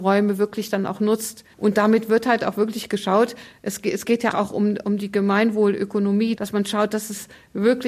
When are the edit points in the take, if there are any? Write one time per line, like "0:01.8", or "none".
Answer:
0:01.5
0:04.3